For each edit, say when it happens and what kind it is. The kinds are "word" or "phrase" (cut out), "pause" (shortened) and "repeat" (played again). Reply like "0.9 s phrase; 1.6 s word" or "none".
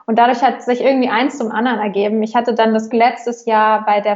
2.9 s word